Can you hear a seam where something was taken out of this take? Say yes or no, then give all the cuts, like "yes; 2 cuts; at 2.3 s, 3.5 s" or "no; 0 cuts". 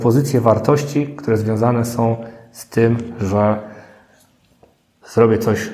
no; 0 cuts